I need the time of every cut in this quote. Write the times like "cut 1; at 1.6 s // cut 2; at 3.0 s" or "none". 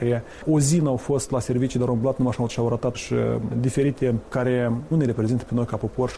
cut 1; at 2.5 s // cut 2; at 2.9 s // cut 3; at 4.3 s // cut 4; at 4.9 s

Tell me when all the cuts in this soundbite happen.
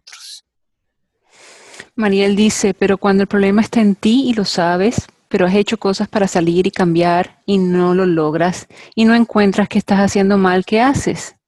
none

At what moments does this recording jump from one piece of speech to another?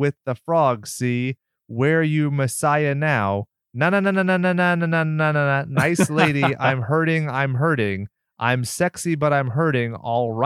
none

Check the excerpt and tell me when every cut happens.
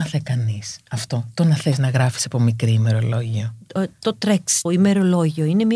cut 1; at 4.7 s

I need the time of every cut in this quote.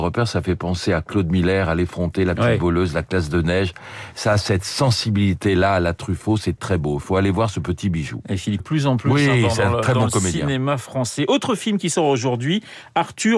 cut 1; at 6.6 s // cut 2; at 8.6 s

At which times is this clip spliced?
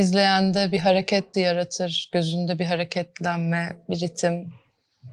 cut 1; at 1.3 s

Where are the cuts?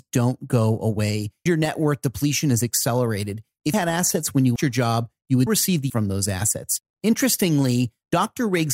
cut 1; at 1.5 s // cut 2; at 3.7 s // cut 3; at 4.6 s // cut 4; at 5.5 s // cut 5; at 5.9 s

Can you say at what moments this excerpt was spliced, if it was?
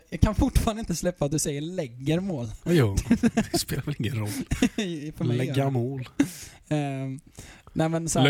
none

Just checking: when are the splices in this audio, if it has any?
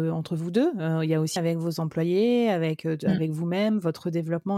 cut 1; at 1.4 s

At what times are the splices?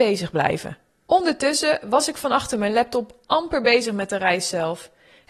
none

